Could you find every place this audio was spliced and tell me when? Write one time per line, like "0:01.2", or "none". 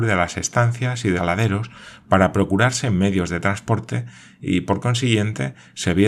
0:01.2